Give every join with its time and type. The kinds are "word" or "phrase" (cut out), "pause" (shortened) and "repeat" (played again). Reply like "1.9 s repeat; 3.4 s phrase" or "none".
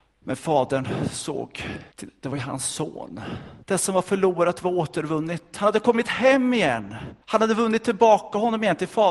1.9 s pause; 3.6 s pause; 7.2 s pause